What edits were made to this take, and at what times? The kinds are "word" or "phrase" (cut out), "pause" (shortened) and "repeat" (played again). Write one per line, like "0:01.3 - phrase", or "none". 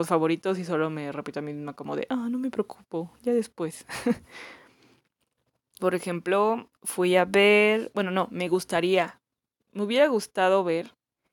0:05.8 - word